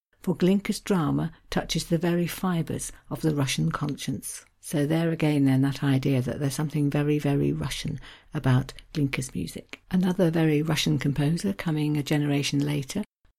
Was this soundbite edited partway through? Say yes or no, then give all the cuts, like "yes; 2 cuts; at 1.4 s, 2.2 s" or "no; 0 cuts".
yes; 2 cuts; at 4.5 s, 9.8 s